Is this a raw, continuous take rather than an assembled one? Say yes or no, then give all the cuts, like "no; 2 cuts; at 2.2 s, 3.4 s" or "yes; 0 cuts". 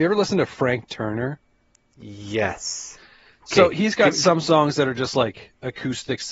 yes; 0 cuts